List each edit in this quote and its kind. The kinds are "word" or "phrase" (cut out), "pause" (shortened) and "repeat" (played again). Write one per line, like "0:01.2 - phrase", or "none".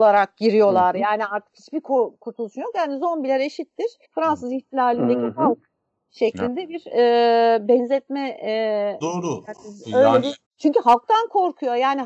0:04.0 - pause
0:09.0 - word
0:10.4 - pause